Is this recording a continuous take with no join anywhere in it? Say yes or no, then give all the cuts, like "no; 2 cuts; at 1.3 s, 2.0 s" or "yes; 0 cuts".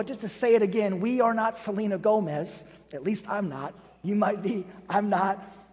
yes; 0 cuts